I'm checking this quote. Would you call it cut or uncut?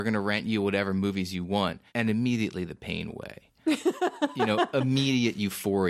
cut